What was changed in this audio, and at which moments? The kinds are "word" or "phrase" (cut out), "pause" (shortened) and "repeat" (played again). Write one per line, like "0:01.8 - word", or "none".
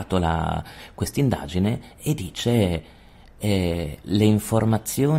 0:01.9 - pause

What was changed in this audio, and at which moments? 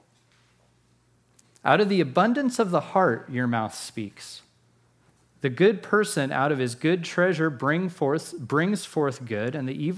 none

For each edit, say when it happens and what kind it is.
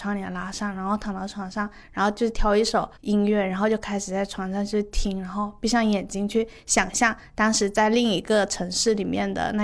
0:03.0 - pause

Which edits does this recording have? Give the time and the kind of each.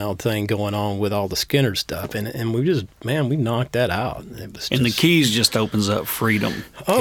none

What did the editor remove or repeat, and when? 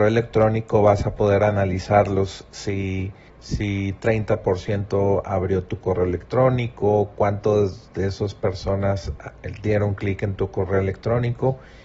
0:03.3 - pause

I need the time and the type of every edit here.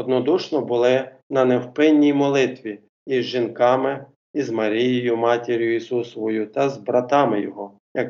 none

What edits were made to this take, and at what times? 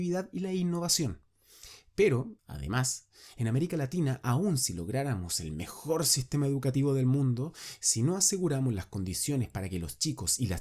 0:02.4 - pause

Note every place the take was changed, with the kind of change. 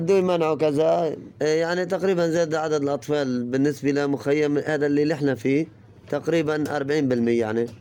none

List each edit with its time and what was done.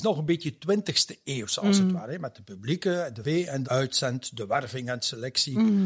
0:03.2 - word
0:03.6 - phrase

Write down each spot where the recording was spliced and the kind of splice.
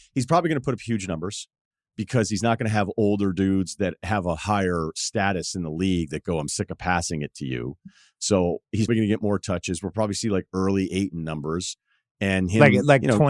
0:08.9 - word

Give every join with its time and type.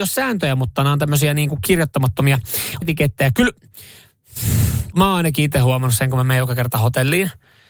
0:02.8 - word
0:04.9 - word

